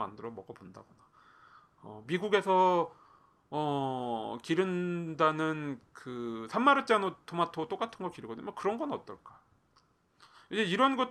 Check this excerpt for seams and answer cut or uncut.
uncut